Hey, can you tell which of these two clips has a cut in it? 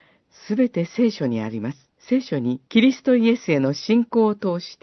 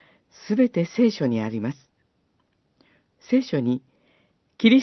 first; 2 cuts; at 2.0 s, 2.7 s

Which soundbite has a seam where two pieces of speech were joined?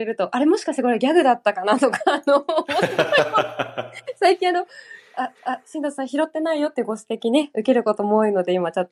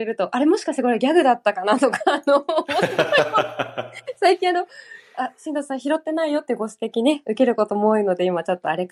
first; 1 cut; at 5.3 s

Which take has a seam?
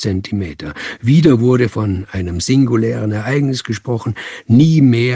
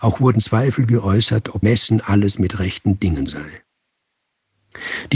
second; 2 cuts; at 1.6 s, 3.3 s

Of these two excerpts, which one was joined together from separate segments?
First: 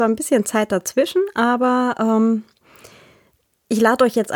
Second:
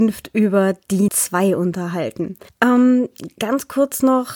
second; 2 cuts; at 1.1 s, 2.5 s

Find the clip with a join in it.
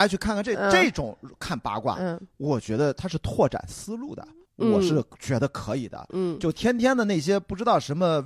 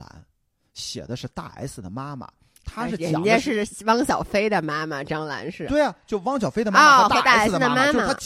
first; 1 cut; at 4.5 s

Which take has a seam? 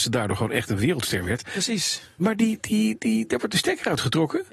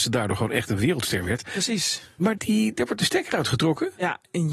second; 2 cuts; at 2.4 s, 2.8 s

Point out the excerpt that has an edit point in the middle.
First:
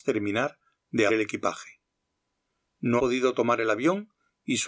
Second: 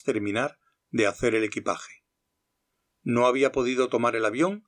first; 2 cuts; at 1.1 s, 3.0 s

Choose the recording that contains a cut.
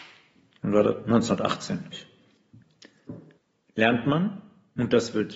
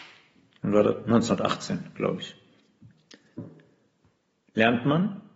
first; 2 cuts; at 1.9 s, 3.4 s

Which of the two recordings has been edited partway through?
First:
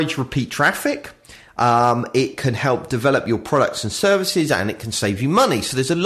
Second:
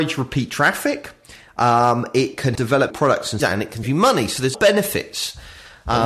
second; 5 cuts; at 2.5 s, 2.9 s, 3.4 s, 3.8 s, 4.5 s

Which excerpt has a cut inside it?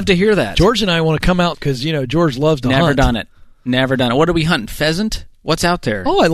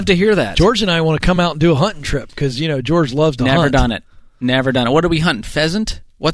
first; 1 cut; at 1.5 s

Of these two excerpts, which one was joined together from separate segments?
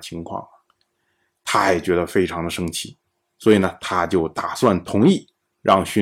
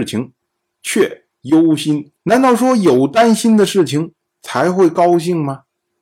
second; 2 cuts; at 1.3 s, 2.2 s

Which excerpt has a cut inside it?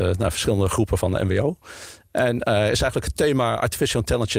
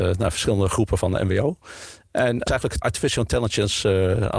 second; 2 cuts; at 2.5 s, 2.8 s

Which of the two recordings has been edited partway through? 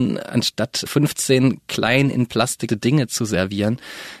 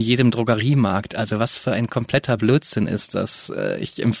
first; 1 cut; at 2.7 s

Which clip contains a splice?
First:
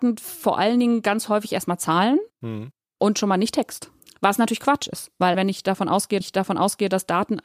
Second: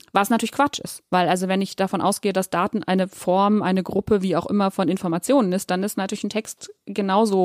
first; 4 cuts; at 2.3 s, 4.0 s, 5.3 s, 6.2 s

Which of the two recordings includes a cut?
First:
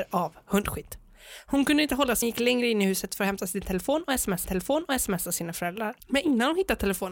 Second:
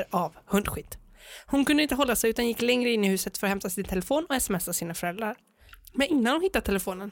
first; 3 cuts; at 2.2 s, 4.4 s, 6.0 s

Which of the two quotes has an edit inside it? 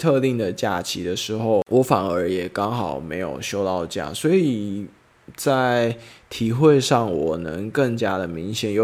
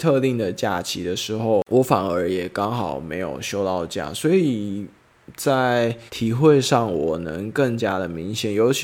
second; 1 cut; at 6.1 s

